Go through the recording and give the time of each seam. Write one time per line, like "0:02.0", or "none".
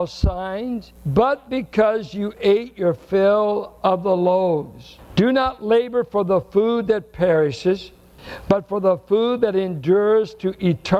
0:01.0